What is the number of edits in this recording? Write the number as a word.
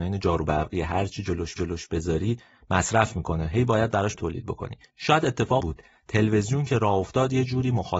three